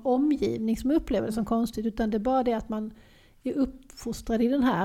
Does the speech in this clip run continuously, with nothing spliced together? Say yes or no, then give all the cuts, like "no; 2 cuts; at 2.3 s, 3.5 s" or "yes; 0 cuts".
yes; 0 cuts